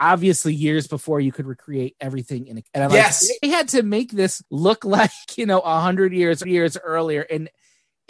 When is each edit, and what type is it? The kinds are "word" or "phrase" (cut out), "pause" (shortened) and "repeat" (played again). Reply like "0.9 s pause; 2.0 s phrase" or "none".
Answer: 2.6 s word; 3.4 s word; 4.4 s pause; 5.2 s pause; 6.4 s repeat